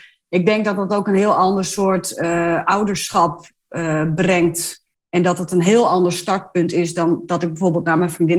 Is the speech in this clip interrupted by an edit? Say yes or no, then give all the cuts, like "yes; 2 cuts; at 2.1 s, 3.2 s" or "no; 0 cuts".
no; 0 cuts